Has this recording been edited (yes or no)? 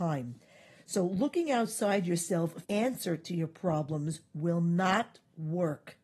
yes